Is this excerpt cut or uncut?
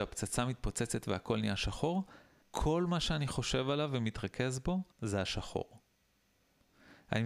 cut